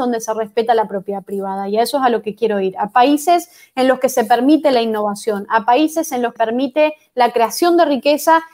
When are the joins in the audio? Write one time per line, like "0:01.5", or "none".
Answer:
0:06.4